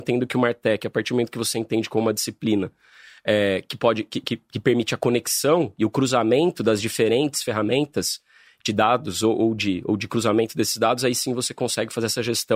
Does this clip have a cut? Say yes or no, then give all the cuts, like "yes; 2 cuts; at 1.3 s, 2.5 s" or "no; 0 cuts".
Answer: no; 0 cuts